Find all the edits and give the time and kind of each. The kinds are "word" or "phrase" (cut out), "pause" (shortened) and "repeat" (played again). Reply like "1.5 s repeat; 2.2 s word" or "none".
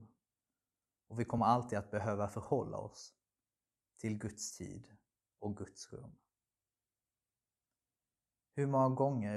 none